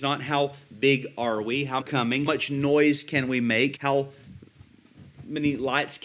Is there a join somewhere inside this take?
yes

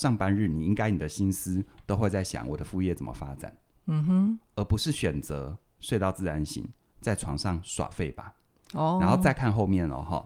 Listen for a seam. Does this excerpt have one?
no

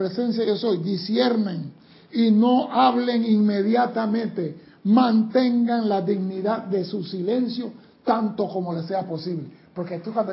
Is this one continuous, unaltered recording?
yes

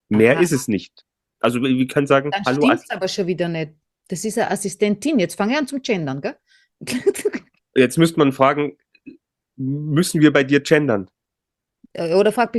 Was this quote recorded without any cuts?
yes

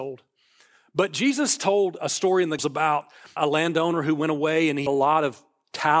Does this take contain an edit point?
yes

